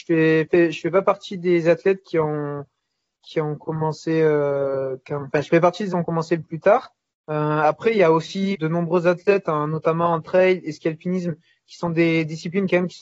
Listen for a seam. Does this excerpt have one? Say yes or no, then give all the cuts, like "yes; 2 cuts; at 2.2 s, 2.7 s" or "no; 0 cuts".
yes; 3 cuts; at 5.9 s, 7.1 s, 8.5 s